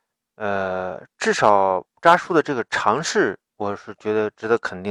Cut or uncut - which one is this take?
cut